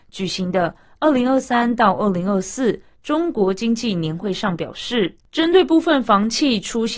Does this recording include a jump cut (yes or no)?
yes